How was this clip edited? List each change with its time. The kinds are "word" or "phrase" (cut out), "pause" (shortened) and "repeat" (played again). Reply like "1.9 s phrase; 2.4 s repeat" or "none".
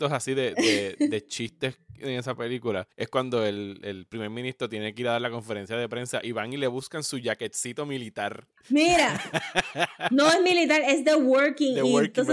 2.9 s pause; 8.6 s pause